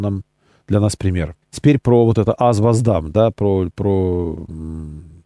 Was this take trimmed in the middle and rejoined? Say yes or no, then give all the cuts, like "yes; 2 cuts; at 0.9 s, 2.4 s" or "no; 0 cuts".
yes; 1 cut; at 1.4 s